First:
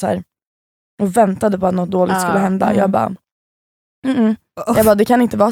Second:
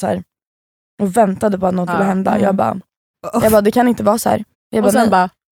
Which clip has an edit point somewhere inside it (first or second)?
second